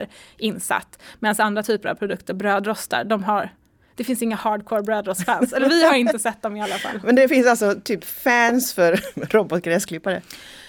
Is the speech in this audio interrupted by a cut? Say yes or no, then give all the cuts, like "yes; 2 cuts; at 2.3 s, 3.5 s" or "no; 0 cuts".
no; 0 cuts